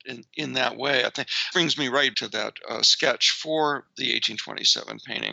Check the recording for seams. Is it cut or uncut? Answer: cut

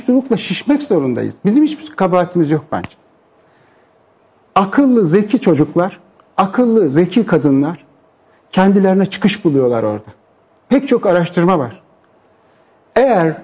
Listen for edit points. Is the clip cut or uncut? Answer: uncut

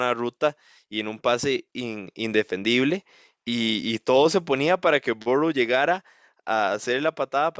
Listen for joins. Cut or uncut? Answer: uncut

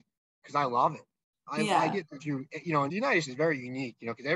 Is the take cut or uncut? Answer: cut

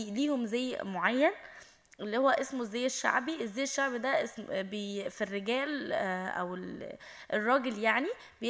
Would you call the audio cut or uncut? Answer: uncut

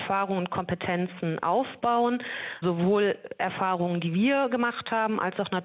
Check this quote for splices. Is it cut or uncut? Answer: cut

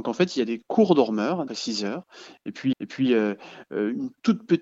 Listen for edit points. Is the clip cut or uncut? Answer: cut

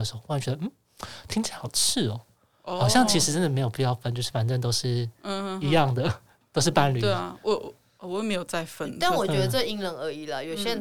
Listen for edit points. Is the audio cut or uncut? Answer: uncut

